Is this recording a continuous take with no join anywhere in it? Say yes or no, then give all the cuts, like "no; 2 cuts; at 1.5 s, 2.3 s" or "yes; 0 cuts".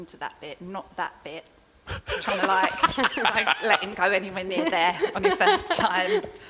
yes; 0 cuts